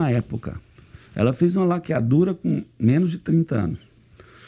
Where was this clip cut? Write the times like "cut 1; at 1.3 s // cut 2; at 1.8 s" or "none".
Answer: cut 1; at 1.0 s